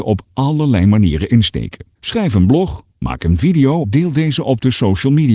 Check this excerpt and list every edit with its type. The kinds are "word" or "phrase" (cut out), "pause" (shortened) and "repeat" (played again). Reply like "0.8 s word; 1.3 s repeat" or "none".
1.9 s pause; 2.9 s pause; 3.8 s phrase